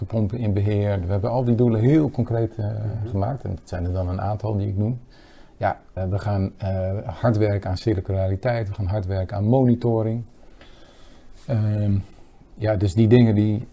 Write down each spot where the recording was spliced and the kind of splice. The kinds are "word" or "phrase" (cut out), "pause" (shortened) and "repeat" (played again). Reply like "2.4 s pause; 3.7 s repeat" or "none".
6.0 s word